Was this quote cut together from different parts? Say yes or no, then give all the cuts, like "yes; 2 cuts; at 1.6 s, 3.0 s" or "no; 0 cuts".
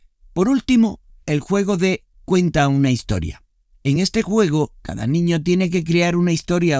no; 0 cuts